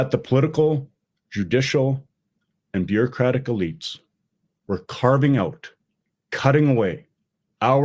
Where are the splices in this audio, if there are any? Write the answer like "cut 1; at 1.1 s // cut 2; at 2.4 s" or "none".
none